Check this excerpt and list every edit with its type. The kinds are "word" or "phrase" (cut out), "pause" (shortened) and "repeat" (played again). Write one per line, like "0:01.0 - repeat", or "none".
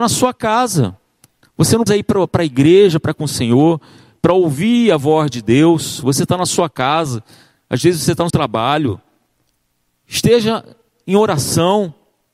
0:01.9 - word
0:03.1 - word
0:08.3 - word